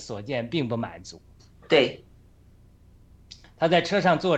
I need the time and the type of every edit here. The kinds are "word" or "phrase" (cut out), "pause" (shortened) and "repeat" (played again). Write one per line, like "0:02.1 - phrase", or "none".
none